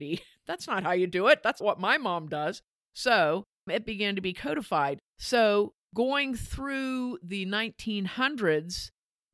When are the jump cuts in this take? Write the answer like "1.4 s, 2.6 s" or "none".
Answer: 1.6 s, 3.7 s, 5.1 s